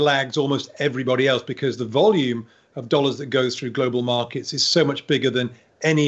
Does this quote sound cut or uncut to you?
uncut